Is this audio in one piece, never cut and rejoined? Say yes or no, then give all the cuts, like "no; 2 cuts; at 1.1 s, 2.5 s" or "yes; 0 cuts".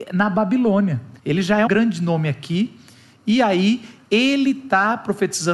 no; 2 cuts; at 1.2 s, 1.7 s